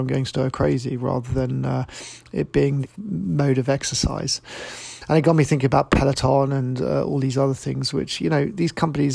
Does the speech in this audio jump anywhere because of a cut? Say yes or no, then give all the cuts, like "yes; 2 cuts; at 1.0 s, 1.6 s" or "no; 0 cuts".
yes; 1 cut; at 2.8 s